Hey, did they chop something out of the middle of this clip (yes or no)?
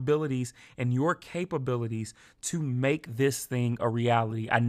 no